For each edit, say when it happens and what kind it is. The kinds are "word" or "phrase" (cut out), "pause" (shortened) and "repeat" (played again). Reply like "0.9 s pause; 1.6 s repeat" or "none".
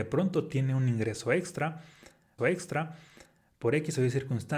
2.4 s repeat